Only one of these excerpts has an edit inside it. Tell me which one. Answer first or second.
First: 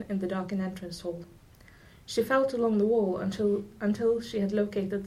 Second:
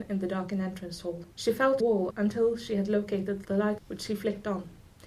second